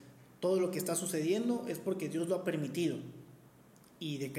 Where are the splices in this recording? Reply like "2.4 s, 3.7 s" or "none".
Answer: none